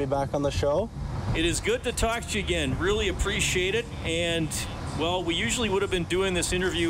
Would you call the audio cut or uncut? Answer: uncut